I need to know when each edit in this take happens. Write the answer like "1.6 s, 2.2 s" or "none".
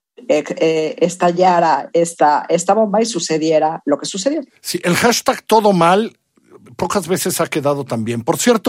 none